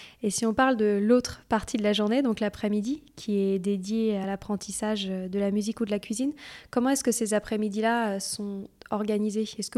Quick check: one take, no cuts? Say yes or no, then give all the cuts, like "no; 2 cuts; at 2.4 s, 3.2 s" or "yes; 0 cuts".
yes; 0 cuts